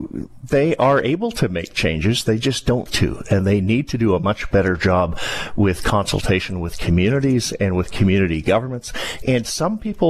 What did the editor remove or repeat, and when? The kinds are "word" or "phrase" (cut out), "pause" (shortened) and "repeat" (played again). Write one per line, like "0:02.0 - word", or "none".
0:02.9 - word